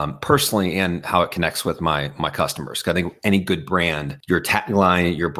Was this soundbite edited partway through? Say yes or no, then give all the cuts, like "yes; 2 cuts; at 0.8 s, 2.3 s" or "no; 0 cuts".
yes; 1 cut; at 4.2 s